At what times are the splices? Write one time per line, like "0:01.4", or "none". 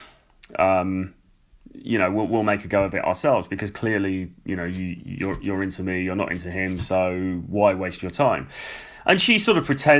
none